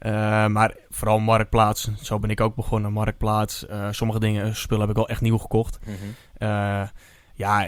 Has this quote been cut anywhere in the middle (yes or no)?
no